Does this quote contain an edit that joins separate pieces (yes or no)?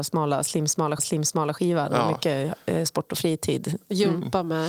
yes